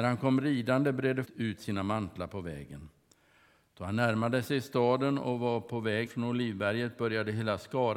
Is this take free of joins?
no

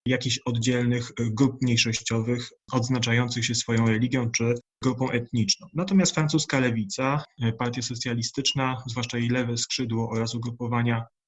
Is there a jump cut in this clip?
no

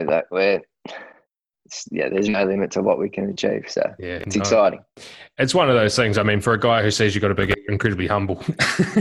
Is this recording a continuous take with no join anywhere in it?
no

